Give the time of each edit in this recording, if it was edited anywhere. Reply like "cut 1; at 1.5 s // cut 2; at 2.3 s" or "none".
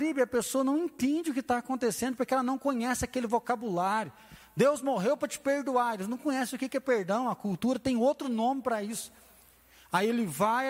none